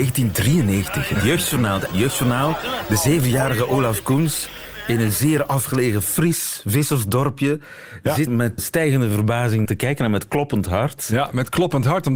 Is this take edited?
yes; 4 cuts; at 1.9 s, 8.3 s, 8.6 s, 9.7 s

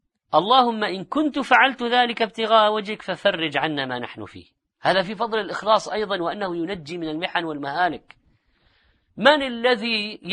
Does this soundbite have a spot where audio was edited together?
no; 0 cuts

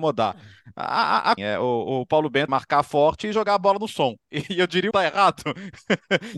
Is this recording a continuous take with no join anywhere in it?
no; 3 cuts; at 1.4 s, 2.5 s, 4.9 s

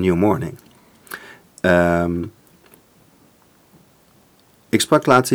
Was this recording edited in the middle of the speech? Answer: no; 0 cuts

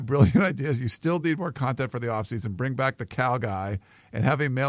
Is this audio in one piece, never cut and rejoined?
yes; 0 cuts

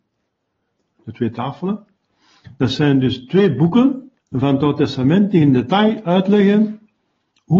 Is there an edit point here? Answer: yes; 1 cut; at 4.2 s

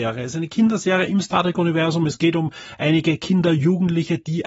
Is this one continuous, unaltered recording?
yes; 0 cuts

